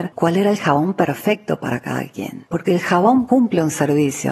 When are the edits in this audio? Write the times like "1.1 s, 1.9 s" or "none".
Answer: none